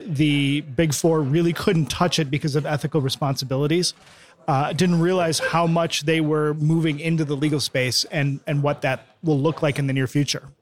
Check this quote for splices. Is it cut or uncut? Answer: uncut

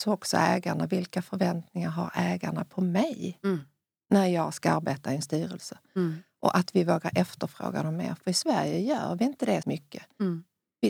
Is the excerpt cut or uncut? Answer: cut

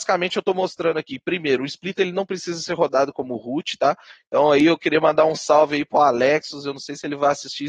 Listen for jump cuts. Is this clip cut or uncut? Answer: uncut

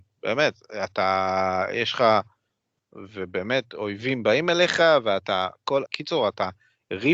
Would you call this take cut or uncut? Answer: cut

